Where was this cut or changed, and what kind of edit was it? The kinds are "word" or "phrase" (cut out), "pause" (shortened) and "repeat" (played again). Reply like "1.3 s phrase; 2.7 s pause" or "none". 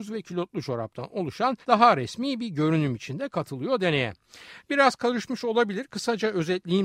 1.6 s pause